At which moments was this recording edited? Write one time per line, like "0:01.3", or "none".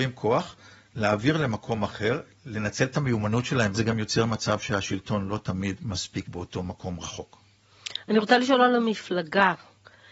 0:03.7
0:06.2